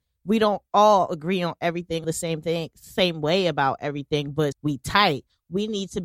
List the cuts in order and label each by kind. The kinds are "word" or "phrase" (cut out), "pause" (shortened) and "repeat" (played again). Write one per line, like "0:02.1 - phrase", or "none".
0:02.0 - phrase
0:04.5 - word